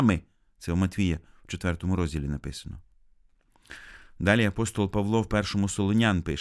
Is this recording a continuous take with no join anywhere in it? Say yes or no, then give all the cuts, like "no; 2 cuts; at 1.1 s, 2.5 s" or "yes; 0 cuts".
yes; 0 cuts